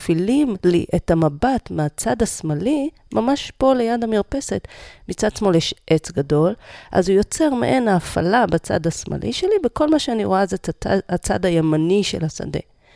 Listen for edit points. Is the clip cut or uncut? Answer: uncut